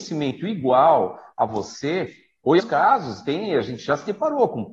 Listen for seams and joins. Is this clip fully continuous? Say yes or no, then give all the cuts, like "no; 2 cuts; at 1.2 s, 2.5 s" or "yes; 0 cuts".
no; 1 cut; at 2.6 s